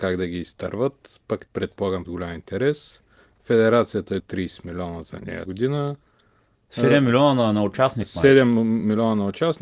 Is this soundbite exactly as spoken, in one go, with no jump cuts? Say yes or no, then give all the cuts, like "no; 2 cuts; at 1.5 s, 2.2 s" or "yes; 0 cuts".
no; 4 cuts; at 1.5 s, 2.0 s, 4.2 s, 5.5 s